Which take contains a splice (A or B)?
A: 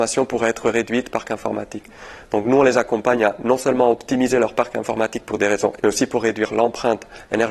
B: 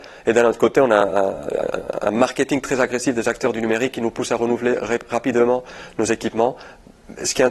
A